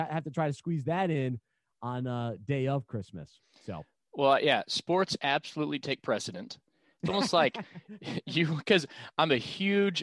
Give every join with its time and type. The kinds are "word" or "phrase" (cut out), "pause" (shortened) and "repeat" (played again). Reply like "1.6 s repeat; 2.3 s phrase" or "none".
none